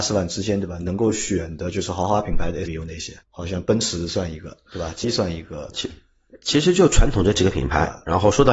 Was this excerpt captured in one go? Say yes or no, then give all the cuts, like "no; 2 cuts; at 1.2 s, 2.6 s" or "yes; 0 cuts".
no; 3 cuts; at 2.7 s, 3.2 s, 5.0 s